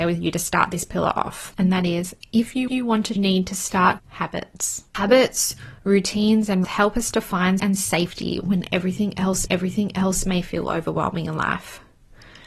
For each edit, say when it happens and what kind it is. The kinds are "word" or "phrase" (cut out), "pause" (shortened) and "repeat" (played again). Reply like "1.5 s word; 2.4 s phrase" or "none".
2.7 s repeat; 3.2 s phrase; 4.0 s phrase; 4.9 s pause; 6.6 s word; 7.6 s word; 9.5 s repeat

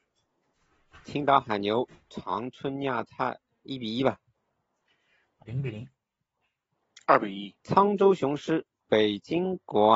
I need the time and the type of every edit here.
1.0 s pause; 3.5 s pause; 5.4 s word; 7.6 s pause

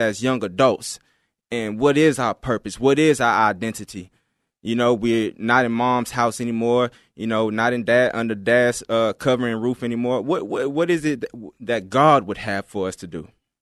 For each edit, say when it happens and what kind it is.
none

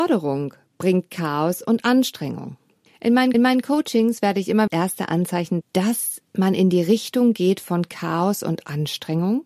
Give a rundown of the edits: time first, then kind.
3.3 s repeat; 4.7 s phrase; 5.6 s word

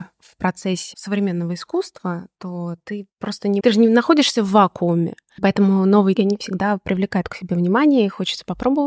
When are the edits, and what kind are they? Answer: 0.9 s word; 3.1 s pause; 3.6 s word; 6.2 s word

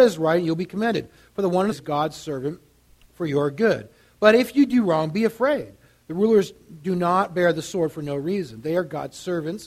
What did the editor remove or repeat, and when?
1.7 s word

